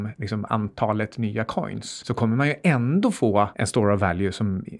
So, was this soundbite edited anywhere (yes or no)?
no